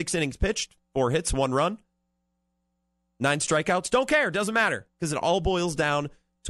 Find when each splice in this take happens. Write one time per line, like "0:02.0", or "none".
none